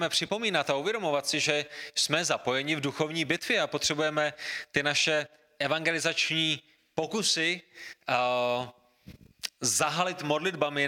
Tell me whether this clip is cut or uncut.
uncut